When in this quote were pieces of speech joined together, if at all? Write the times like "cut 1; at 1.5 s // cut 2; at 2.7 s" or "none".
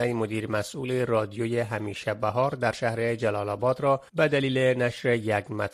cut 1; at 4.1 s